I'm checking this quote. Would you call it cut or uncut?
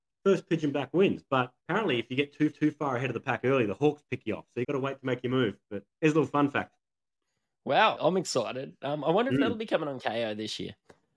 cut